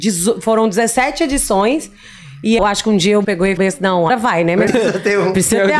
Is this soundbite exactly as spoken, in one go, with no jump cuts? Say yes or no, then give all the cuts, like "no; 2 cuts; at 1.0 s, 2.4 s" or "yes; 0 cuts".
no; 5 cuts; at 2.6 s, 3.2 s, 3.6 s, 4.1 s, 4.7 s